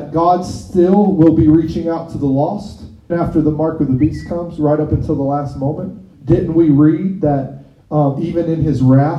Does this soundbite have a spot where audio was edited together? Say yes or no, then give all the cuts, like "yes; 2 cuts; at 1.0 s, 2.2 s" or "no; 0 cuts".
yes; 2 cuts; at 3.1 s, 6.1 s